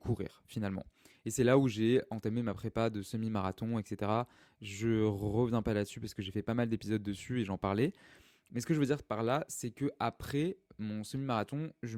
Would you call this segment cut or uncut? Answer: uncut